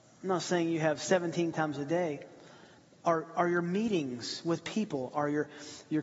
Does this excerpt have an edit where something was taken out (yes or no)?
yes